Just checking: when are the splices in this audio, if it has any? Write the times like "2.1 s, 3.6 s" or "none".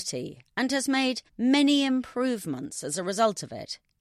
1.3 s